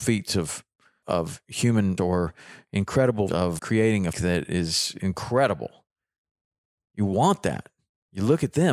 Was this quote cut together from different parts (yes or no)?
yes